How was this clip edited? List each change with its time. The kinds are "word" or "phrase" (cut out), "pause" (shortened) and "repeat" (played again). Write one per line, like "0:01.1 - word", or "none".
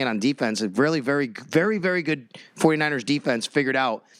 none